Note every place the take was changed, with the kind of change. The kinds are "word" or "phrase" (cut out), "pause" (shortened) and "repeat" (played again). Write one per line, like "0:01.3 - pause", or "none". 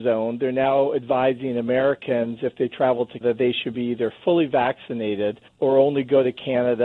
0:03.2 - word
0:05.5 - pause